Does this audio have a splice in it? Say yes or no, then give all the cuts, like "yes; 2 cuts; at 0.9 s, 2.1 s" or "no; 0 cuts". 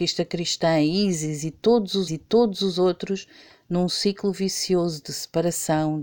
yes; 1 cut; at 2.1 s